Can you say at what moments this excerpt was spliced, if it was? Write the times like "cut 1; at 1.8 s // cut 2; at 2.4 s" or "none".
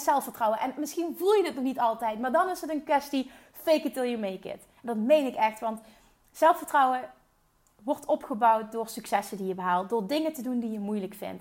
none